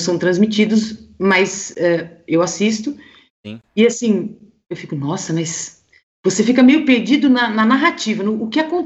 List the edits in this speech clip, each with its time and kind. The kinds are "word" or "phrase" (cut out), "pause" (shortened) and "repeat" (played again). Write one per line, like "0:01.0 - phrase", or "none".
none